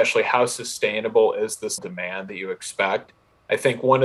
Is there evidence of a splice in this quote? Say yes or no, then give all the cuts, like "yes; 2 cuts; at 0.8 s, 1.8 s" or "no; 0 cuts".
yes; 1 cut; at 1.8 s